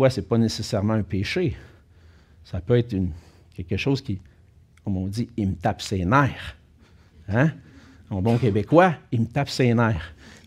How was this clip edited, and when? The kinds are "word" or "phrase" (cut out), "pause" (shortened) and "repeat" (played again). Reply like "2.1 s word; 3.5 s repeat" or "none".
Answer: none